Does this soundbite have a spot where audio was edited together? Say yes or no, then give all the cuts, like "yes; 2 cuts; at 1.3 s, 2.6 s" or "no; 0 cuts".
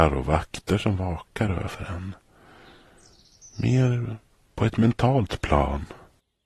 no; 0 cuts